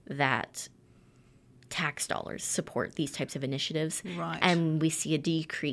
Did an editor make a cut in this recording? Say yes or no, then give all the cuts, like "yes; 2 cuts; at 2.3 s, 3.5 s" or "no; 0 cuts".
no; 0 cuts